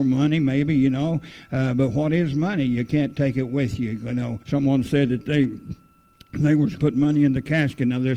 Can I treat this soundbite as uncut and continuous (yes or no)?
no